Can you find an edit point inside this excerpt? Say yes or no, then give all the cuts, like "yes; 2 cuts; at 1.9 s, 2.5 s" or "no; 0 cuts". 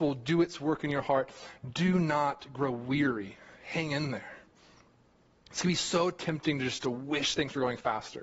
no; 0 cuts